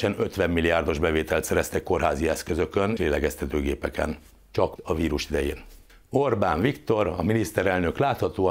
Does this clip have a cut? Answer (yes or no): yes